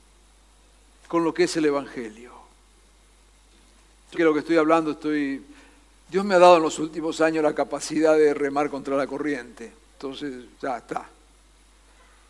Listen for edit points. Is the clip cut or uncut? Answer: cut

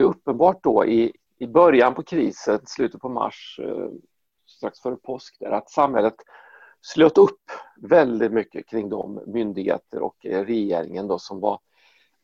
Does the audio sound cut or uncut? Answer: uncut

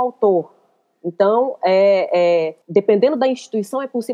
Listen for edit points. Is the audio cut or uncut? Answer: cut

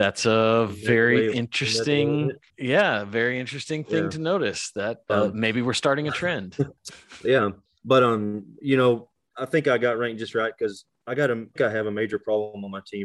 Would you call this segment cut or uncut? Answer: cut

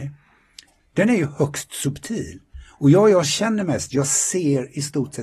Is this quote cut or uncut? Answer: uncut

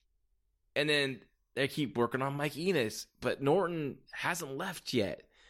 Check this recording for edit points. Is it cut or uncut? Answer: uncut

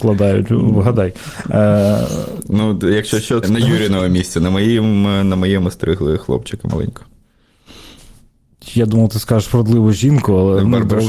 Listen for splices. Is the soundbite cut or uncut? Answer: cut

